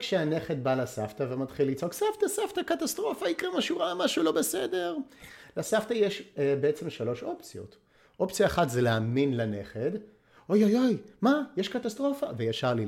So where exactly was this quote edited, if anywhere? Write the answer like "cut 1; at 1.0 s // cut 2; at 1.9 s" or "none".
none